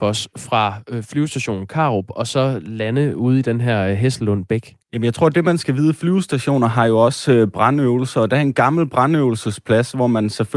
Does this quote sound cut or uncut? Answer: cut